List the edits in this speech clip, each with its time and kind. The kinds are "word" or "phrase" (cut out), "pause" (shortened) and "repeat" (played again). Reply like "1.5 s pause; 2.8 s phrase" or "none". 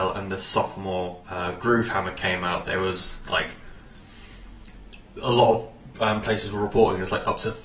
1.2 s pause